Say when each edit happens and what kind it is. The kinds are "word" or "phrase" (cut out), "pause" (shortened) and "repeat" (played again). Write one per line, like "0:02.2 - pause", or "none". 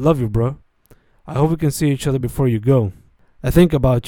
none